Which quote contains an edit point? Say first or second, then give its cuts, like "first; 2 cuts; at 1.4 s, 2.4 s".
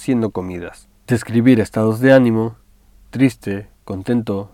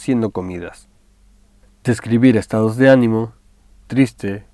first; 1 cut; at 1.0 s